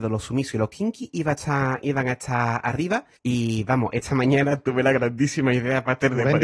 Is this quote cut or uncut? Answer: cut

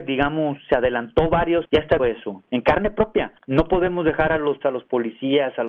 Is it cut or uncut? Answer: cut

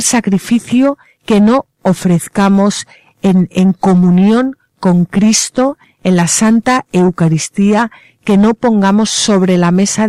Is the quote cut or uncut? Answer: uncut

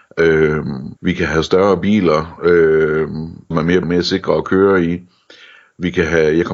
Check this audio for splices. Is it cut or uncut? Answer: cut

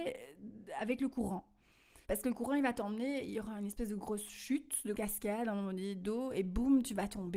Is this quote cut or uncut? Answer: cut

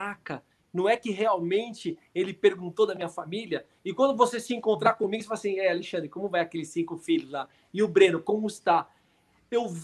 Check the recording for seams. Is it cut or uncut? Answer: uncut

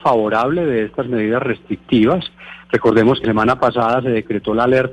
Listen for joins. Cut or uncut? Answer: cut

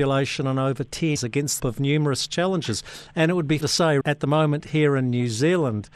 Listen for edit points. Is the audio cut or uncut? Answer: cut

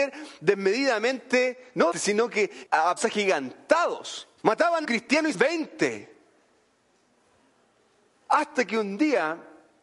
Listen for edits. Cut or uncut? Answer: cut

